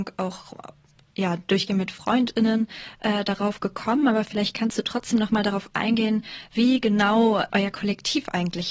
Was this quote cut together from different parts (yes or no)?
yes